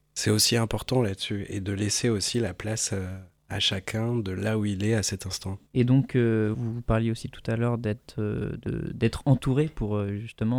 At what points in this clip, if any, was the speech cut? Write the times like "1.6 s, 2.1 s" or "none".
5.7 s, 6.5 s